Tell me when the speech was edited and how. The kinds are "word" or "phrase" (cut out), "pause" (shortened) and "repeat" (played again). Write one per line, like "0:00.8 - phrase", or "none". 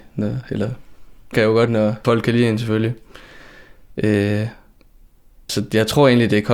0:01.3 - word
0:01.7 - word
0:02.0 - word
0:05.5 - word